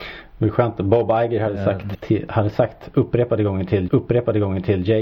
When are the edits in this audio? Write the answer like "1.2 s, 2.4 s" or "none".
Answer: 1.9 s, 3.9 s